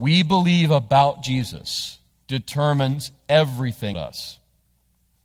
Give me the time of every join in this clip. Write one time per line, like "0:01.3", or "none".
0:02.1
0:03.9